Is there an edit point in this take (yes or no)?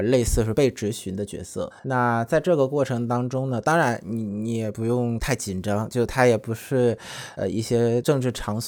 yes